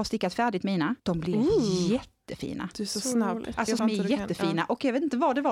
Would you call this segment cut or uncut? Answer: cut